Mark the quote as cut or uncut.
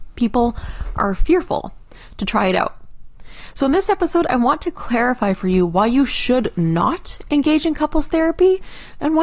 uncut